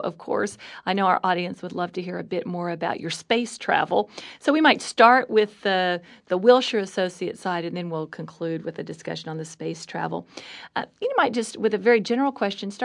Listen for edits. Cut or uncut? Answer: uncut